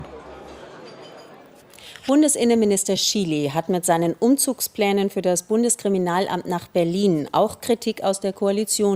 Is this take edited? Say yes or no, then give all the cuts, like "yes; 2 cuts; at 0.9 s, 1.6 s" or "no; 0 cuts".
no; 0 cuts